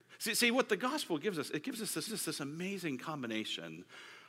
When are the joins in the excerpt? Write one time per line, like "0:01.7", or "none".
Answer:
0:02.1